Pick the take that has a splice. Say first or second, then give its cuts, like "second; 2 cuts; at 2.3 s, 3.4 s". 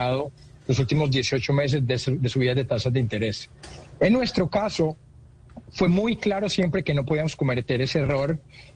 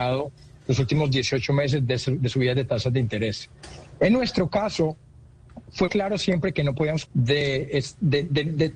second; 2 cuts; at 5.9 s, 7.0 s